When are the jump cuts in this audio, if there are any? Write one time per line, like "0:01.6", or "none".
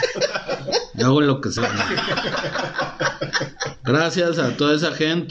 0:01.6